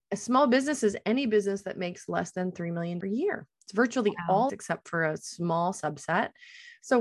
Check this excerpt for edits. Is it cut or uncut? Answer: cut